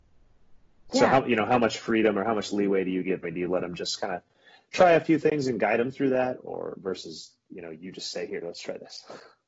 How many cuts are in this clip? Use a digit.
2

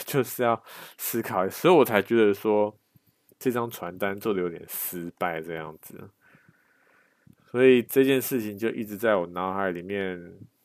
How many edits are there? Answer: 0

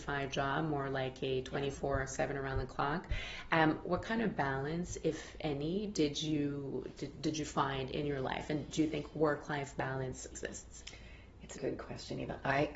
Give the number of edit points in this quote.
2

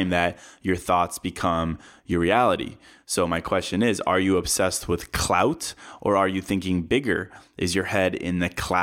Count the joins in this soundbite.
0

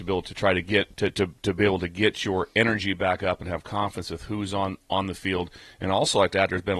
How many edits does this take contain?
1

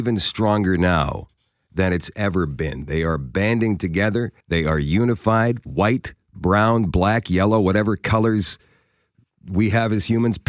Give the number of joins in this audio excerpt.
1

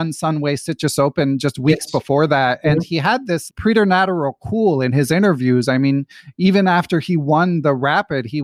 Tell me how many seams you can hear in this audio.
1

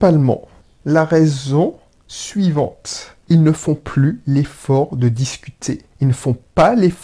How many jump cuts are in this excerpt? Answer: 2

